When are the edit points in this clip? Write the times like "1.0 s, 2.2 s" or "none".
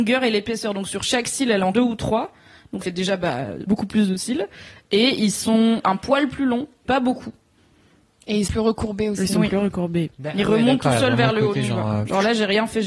1.7 s, 2.8 s, 3.7 s, 5.8 s, 6.8 s, 8.5 s